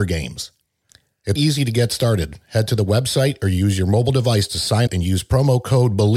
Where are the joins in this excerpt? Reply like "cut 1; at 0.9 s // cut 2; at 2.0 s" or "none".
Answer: cut 1; at 1.4 s // cut 2; at 4.9 s